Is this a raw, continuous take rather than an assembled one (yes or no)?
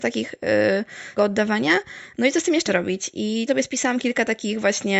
no